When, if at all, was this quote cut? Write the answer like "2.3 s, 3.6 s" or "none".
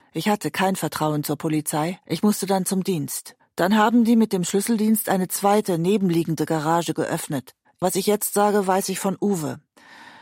2.0 s, 3.4 s, 7.6 s